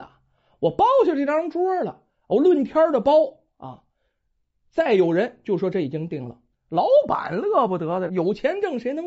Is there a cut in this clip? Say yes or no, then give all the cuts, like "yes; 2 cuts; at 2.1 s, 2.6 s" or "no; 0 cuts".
yes; 2 cuts; at 6.5 s, 8.1 s